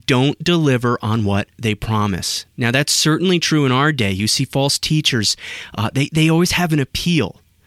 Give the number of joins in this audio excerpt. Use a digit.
0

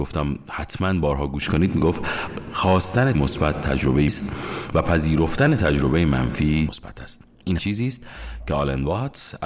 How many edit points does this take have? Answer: 4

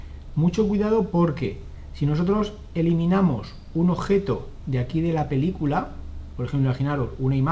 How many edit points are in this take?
0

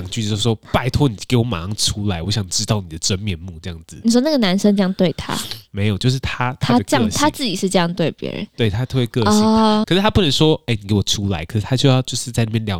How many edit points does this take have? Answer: 1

